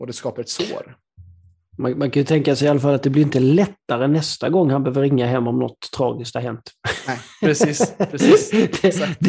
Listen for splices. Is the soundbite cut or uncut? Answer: uncut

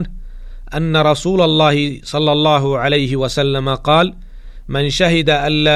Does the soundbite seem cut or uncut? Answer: uncut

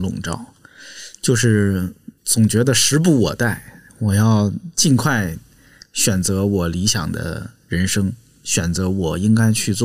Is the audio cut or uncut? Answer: cut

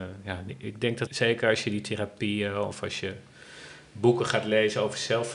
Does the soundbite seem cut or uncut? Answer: cut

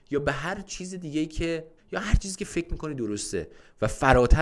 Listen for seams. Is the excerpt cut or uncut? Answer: cut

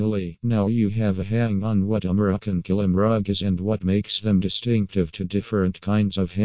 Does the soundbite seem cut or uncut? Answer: uncut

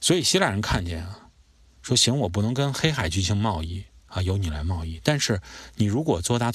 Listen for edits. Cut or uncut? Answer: uncut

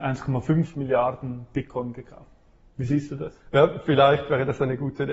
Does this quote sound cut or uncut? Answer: uncut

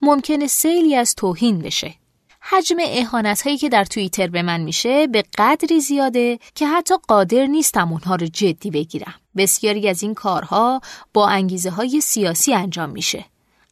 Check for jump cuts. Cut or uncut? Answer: cut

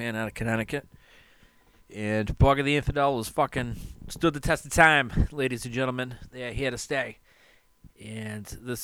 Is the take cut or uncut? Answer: uncut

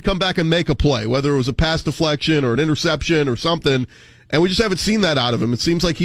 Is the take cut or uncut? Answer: uncut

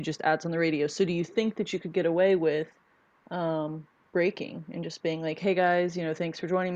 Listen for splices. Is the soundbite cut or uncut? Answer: uncut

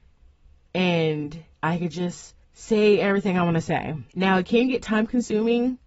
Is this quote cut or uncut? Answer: cut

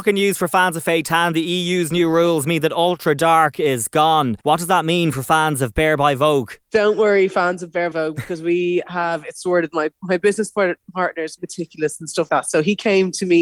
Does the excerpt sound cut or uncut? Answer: cut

